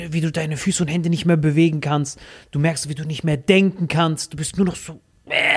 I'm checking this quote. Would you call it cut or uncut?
uncut